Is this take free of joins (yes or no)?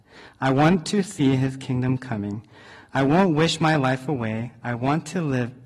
yes